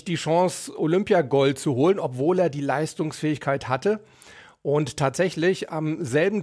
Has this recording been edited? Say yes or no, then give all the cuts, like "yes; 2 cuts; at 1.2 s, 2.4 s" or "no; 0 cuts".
no; 0 cuts